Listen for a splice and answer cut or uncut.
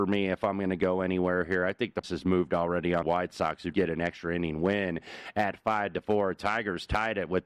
cut